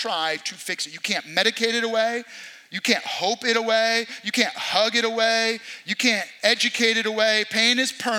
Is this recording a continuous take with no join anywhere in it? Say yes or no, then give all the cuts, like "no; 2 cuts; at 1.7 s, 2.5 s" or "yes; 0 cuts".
yes; 0 cuts